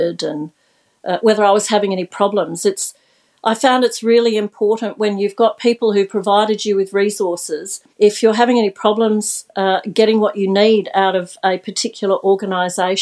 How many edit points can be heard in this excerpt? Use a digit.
1